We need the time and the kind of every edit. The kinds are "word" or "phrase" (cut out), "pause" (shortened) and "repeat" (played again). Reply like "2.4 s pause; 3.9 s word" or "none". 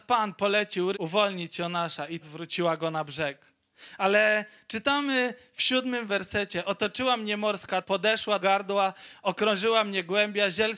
0.9 s word; 2.2 s word; 6.1 s phrase; 7.8 s word; 8.4 s word